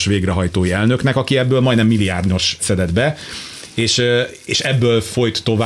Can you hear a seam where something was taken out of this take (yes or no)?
yes